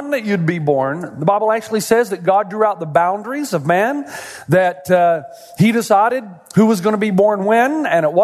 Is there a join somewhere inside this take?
no; 0 cuts

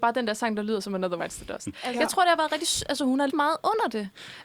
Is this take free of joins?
no; 2 cuts; at 1.2 s, 3.3 s

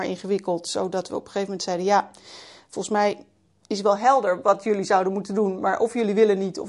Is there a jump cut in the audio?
no; 0 cuts

